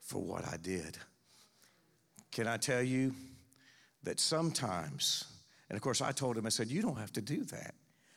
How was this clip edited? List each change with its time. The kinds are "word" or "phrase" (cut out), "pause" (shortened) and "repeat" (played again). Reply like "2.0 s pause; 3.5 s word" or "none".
none